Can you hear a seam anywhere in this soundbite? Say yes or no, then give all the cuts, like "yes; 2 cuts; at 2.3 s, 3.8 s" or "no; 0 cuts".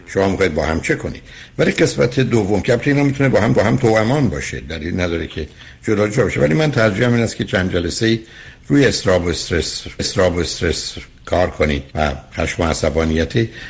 yes; 3 cuts; at 3.6 s, 10.0 s, 11.9 s